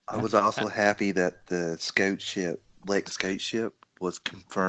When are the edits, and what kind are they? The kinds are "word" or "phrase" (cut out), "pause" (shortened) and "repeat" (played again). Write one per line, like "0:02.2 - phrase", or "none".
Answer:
0:03.1 - word